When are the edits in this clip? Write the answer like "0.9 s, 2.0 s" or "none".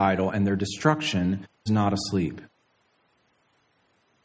1.7 s